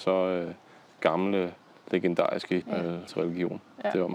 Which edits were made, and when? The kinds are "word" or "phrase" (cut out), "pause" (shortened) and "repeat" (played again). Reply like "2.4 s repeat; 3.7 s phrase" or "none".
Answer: 2.6 s word; 3.1 s word